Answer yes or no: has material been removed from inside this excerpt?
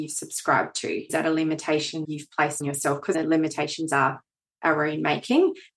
yes